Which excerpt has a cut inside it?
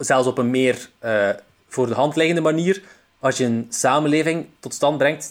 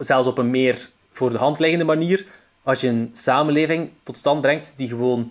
second; 1 cut; at 1.0 s

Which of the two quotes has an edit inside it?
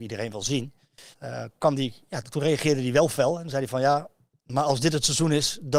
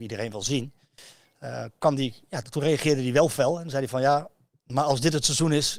first; 1 cut; at 1.1 s

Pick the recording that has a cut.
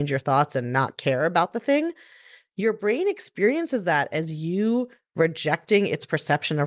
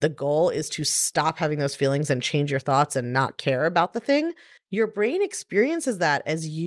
second; 1 cut; at 4.6 s

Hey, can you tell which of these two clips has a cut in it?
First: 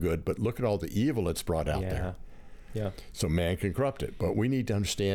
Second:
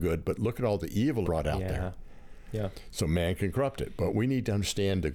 second; 1 cut; at 1.2 s

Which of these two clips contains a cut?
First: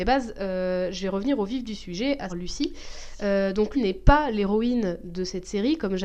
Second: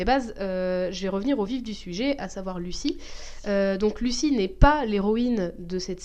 first; 2 cuts; at 2.3 s, 3.7 s

